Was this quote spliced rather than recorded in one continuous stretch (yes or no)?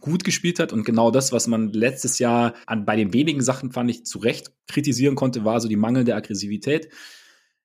yes